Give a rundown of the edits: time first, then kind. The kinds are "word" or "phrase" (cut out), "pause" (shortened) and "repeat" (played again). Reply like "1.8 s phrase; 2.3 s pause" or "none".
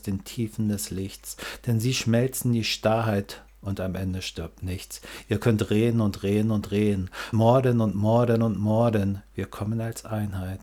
7.3 s word